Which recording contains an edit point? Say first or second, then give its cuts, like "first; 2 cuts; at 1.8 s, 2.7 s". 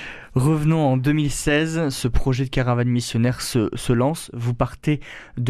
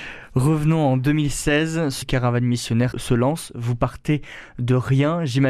second; 2 cuts; at 2.0 s, 2.9 s